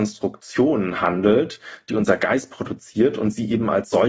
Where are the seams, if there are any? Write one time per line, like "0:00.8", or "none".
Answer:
none